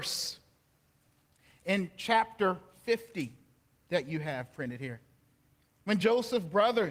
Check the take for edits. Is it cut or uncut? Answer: uncut